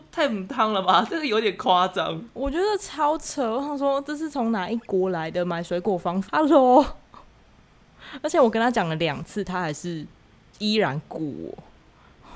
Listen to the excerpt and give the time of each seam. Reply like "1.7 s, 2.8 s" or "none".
6.3 s